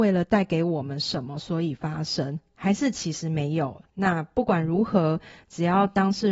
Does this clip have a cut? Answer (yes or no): yes